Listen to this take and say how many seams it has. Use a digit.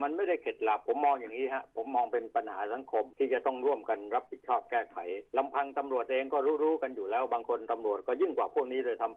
1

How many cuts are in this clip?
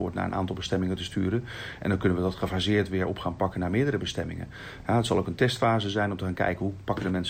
0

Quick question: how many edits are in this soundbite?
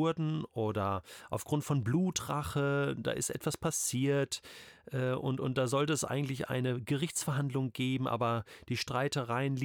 0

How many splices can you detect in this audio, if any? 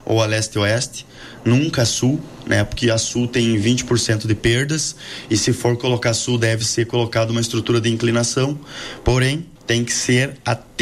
1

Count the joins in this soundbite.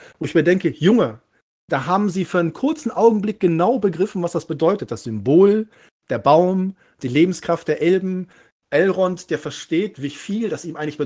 0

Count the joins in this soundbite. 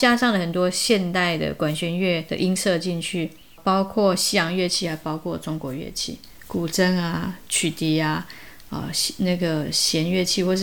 0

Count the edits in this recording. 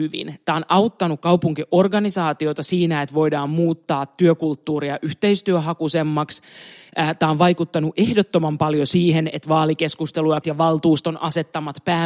1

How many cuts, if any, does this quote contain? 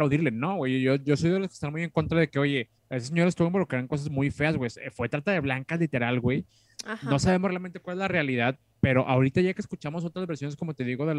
1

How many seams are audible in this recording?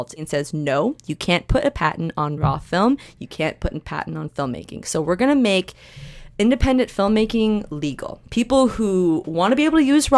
0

